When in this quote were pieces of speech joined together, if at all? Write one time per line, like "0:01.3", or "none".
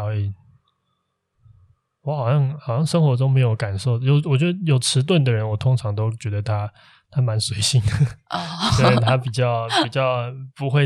none